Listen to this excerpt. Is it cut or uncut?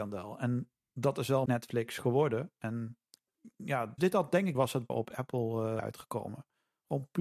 cut